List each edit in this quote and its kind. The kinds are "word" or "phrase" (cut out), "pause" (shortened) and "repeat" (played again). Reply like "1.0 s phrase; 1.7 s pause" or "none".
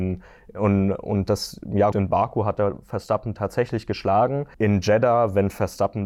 1.9 s word; 4.5 s pause